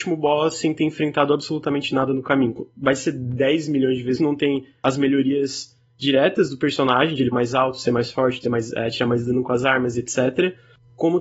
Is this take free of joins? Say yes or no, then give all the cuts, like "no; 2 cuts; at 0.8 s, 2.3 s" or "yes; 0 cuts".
no; 2 cuts; at 4.2 s, 7.3 s